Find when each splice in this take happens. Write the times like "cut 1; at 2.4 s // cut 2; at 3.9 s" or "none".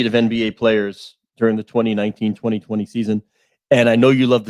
none